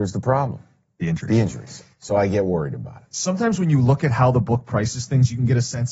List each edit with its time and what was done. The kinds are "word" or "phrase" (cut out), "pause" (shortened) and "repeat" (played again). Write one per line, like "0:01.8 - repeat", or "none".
0:01.9 - pause

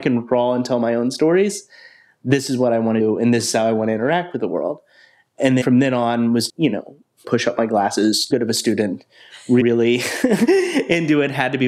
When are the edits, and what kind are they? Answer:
0:03.0 - word
0:05.6 - word
0:06.5 - word
0:07.2 - word
0:08.3 - word
0:09.6 - word

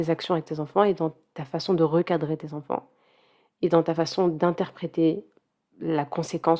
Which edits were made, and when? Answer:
none

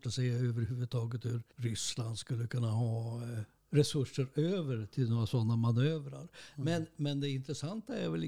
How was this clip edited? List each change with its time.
0:01.5 - pause
0:03.6 - pause

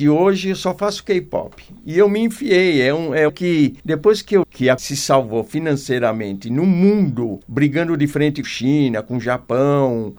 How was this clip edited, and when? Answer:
0:03.3 - phrase
0:03.8 - pause
0:04.4 - word
0:04.8 - word
0:07.4 - pause
0:08.4 - word

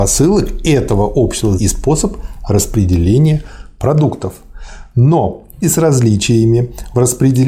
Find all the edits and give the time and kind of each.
0:01.6 - word
0:05.6 - word

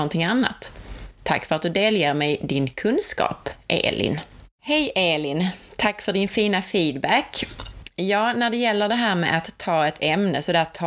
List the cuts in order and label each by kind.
0:04.5 - pause

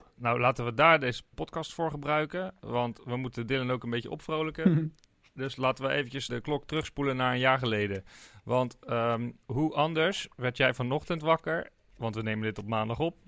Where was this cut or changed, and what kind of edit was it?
0:01.3 - word
0:06.3 - word
0:09.4 - pause

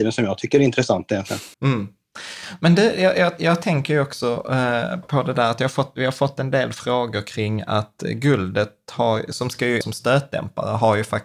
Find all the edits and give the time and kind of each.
0:01.5 - pause
0:05.0 - word
0:09.8 - phrase

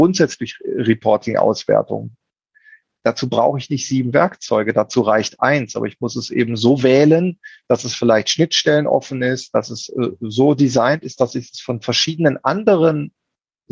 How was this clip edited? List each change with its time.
none

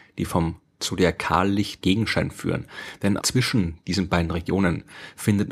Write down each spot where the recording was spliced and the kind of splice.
0:01.8 - word
0:03.2 - word

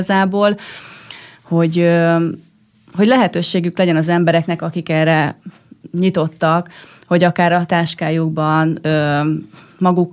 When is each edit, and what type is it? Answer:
none

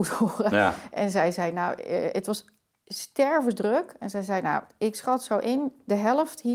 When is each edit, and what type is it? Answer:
none

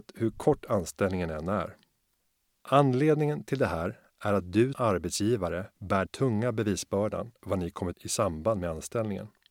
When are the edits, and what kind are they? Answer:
0:04.7 - word
0:06.1 - word
0:07.4 - word
0:07.9 - phrase

